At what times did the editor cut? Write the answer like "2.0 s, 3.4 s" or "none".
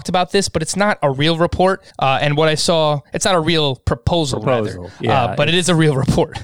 1.9 s